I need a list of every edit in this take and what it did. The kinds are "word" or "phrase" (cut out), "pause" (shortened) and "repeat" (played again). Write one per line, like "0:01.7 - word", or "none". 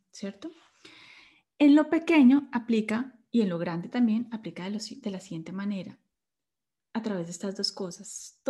none